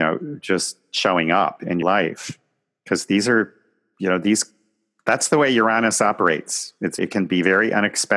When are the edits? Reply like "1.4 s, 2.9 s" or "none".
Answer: 1.8 s, 7.0 s